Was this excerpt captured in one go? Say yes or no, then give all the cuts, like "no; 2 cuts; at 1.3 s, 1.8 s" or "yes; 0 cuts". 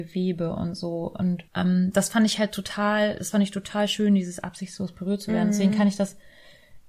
no; 1 cut; at 1.5 s